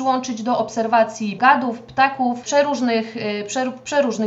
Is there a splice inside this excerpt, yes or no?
yes